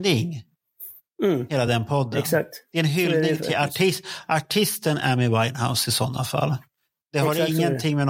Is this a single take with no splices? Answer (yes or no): yes